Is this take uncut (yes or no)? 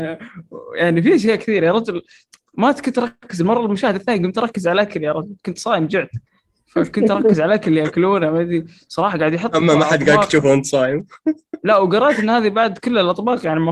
yes